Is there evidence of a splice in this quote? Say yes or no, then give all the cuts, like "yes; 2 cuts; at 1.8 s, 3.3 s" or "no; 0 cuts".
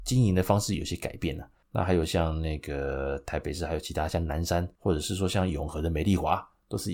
yes; 2 cuts; at 1.6 s, 4.8 s